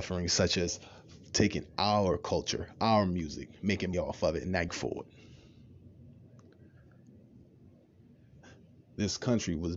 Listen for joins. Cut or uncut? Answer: cut